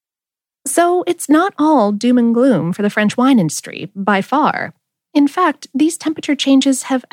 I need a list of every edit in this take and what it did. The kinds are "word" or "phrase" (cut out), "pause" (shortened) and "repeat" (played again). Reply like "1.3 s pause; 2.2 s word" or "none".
none